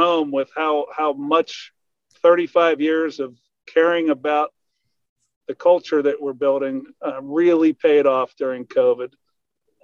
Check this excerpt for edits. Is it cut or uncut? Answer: uncut